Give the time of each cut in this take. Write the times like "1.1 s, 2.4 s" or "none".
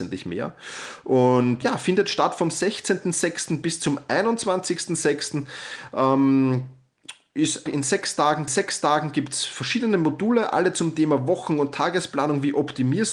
1.6 s, 7.7 s, 8.5 s